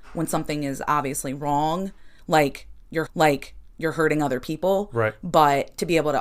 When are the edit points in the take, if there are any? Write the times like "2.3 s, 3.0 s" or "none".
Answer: 3.1 s